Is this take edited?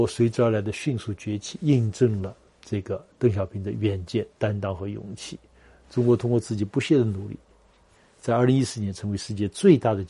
no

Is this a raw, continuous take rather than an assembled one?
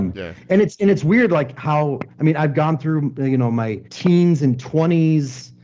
no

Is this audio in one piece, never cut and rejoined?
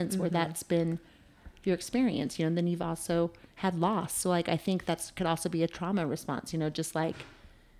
yes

